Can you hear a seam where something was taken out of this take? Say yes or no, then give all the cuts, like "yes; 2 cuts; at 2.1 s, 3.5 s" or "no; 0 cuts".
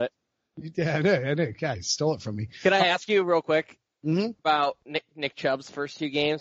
yes; 1 cut; at 4.4 s